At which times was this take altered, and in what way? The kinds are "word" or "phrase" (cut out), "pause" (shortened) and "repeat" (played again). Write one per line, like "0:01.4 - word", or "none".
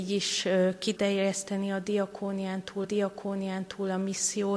0:01.0 - word
0:02.8 - repeat